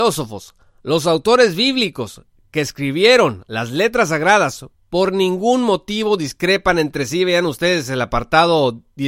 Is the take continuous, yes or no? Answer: yes